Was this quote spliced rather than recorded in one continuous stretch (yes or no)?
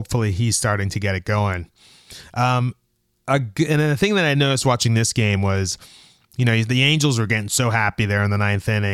no